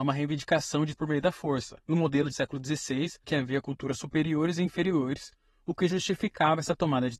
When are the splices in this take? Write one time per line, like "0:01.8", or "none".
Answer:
0:01.0
0:01.8
0:02.3
0:03.2